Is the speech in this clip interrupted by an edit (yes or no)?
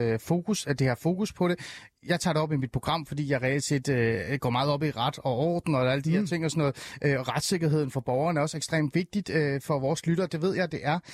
no